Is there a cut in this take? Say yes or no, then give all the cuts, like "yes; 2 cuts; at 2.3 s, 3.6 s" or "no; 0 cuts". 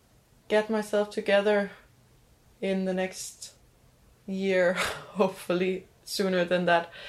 no; 0 cuts